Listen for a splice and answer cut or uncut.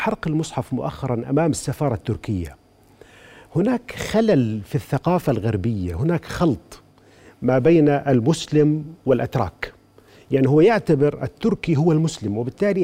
uncut